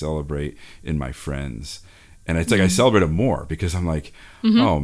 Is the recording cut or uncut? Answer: uncut